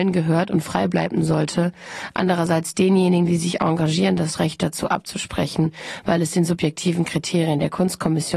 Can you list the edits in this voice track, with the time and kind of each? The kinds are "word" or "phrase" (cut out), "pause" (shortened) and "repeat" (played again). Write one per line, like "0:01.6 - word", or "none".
none